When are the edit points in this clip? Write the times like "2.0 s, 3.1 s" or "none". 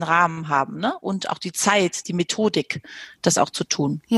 2.0 s